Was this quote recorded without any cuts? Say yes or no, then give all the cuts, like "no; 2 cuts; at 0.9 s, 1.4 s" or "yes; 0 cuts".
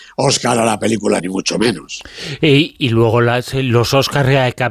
no; 1 cut; at 1.2 s